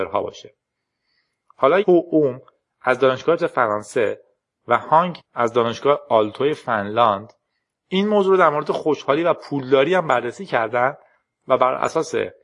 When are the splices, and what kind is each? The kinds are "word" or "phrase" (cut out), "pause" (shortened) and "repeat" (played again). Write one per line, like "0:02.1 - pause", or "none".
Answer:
0:01.8 - word
0:03.4 - word
0:05.2 - word